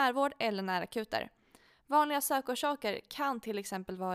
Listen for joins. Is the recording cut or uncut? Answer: uncut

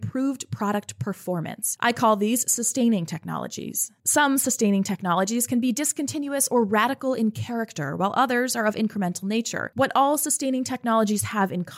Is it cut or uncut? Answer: uncut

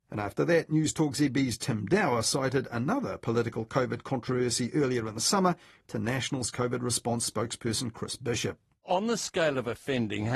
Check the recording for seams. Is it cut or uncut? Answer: uncut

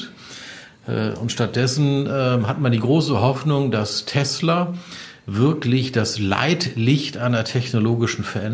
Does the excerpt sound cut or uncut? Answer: uncut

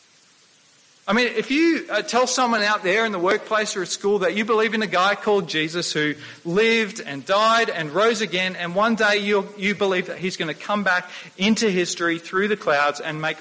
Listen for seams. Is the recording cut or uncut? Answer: uncut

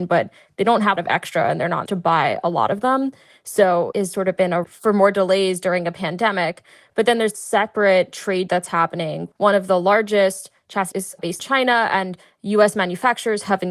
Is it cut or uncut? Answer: cut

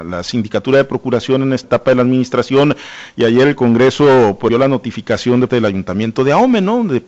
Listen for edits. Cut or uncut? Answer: cut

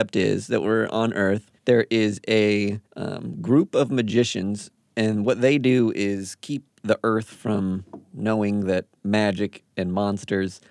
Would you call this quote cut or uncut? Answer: cut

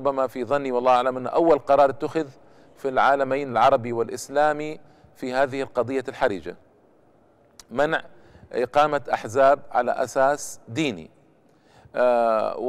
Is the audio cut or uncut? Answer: uncut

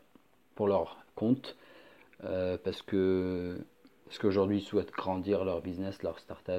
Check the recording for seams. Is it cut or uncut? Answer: uncut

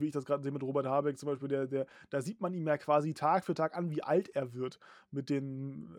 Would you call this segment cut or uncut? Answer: uncut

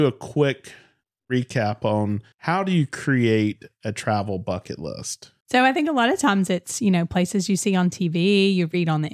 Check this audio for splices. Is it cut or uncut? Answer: cut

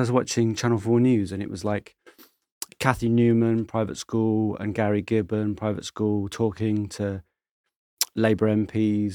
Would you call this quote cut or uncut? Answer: uncut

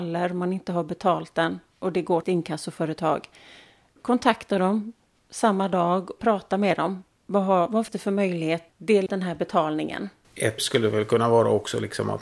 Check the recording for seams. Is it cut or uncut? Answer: cut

